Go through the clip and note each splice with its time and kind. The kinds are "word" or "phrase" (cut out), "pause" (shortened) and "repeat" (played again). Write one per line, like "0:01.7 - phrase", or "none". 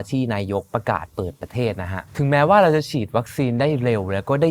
0:02.1 - pause